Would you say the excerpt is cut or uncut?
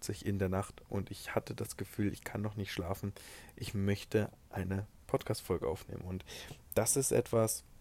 uncut